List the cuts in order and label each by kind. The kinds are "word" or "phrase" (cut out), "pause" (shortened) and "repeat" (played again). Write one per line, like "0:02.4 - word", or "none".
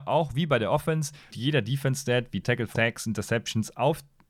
0:01.3 - word
0:02.4 - word
0:02.7 - word